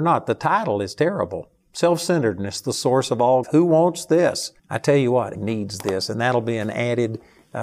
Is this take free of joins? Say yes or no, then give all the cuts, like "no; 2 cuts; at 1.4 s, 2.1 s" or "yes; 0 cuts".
no; 3 cuts; at 3.4 s, 4.6 s, 5.3 s